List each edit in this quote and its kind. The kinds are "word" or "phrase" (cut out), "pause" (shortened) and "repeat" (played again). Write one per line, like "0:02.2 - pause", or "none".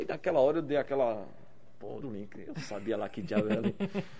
0:02.0 - word